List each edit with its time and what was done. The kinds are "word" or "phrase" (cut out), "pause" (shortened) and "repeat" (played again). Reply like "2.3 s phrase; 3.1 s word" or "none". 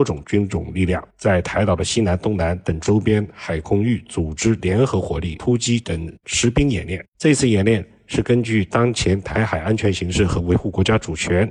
1.1 s pause; 7.1 s pause